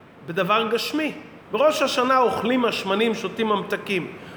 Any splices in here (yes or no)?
yes